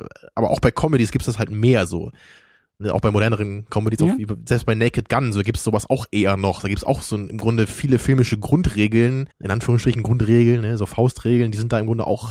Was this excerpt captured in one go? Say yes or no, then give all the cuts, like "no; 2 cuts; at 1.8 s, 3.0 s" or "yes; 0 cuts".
no; 1 cut; at 9.3 s